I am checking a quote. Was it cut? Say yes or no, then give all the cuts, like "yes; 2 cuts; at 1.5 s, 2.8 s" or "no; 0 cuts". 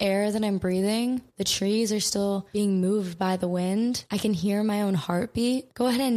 no; 0 cuts